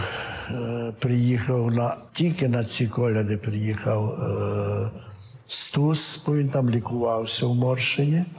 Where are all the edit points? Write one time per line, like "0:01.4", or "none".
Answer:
0:02.1